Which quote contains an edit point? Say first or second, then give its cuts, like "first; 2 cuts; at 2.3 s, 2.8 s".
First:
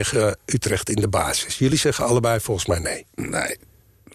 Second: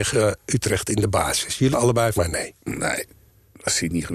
second; 2 cuts; at 1.7 s, 2.1 s